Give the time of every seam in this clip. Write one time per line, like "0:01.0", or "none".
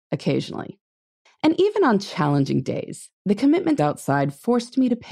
0:01.3
0:03.1
0:03.8